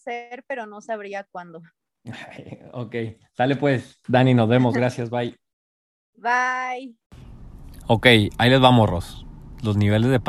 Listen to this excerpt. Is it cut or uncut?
uncut